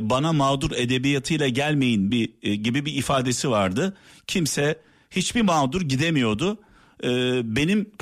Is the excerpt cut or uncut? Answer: uncut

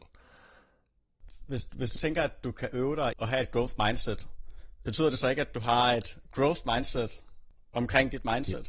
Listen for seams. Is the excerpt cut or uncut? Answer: cut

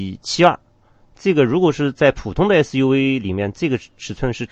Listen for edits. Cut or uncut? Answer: uncut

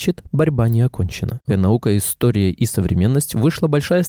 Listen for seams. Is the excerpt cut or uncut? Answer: cut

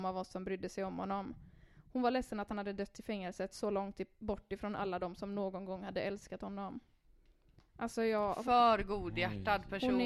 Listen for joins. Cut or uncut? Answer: uncut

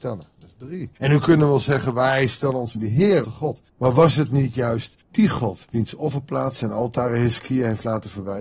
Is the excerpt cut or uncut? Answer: cut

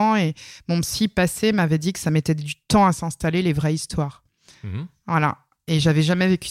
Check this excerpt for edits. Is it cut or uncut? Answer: uncut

